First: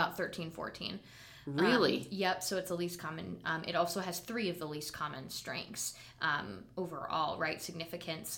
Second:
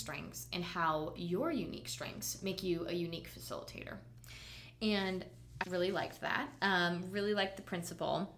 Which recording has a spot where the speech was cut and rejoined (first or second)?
second